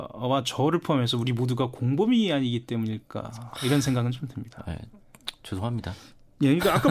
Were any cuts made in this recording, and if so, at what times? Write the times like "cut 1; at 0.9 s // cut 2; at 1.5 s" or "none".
none